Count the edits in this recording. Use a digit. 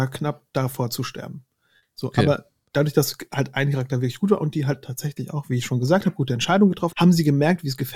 1